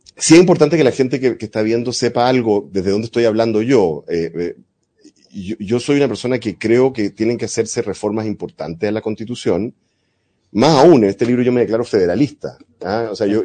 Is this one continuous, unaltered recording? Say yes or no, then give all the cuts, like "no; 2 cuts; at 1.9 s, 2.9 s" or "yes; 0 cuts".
yes; 0 cuts